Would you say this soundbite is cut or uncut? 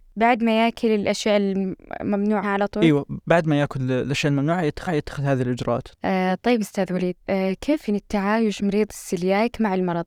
cut